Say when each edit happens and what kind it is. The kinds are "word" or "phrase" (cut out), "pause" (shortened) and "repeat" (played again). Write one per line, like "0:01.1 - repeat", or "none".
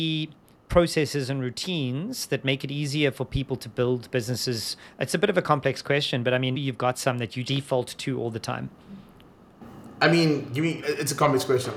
0:06.5 - word
0:07.4 - word
0:10.8 - word